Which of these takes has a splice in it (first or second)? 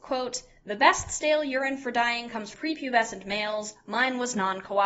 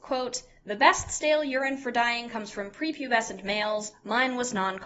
first